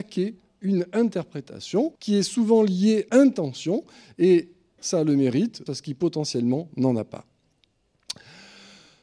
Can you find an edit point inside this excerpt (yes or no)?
yes